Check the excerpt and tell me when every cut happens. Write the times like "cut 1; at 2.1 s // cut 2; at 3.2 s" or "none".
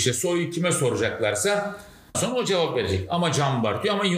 cut 1; at 2.1 s